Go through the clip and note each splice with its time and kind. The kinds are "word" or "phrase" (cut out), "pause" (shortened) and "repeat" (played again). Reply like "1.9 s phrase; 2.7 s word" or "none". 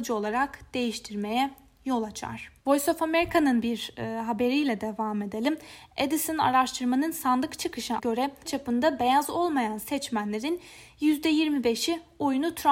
2.6 s pause; 8.0 s word; 8.4 s word